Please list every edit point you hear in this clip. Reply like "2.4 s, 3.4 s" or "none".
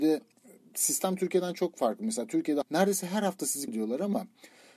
2.6 s, 3.7 s